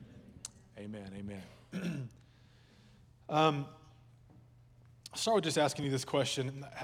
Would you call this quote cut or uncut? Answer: uncut